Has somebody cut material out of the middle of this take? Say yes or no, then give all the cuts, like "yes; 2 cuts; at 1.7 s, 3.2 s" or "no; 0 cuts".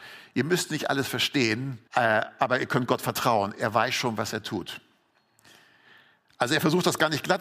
yes; 1 cut; at 1.9 s